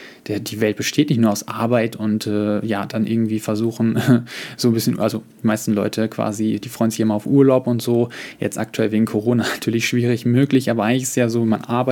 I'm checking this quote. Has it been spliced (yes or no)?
no